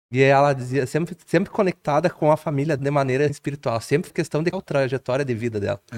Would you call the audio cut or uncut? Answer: cut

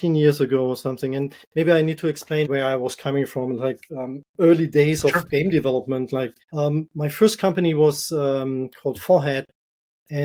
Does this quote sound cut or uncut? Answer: cut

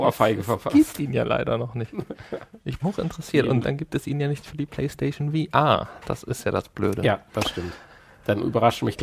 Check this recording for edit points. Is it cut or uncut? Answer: cut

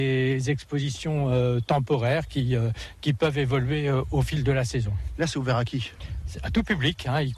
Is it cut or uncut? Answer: uncut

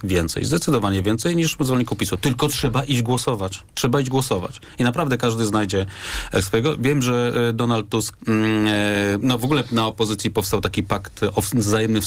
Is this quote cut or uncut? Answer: cut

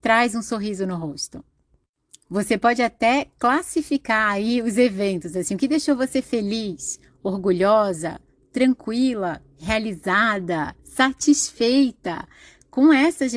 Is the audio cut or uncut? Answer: uncut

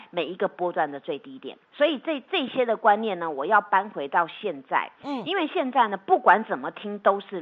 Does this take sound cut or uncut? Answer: cut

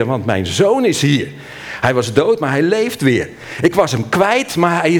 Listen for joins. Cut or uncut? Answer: uncut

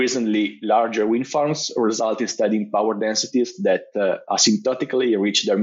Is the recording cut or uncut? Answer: uncut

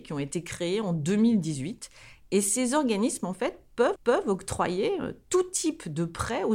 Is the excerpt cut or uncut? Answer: cut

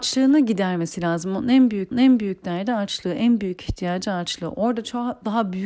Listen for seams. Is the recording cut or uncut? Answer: cut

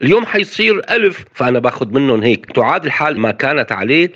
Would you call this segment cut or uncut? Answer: cut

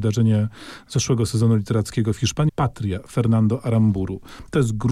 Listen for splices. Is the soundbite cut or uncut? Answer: cut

